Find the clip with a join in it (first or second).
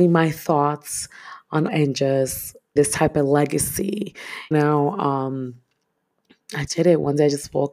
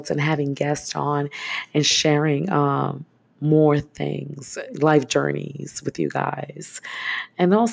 first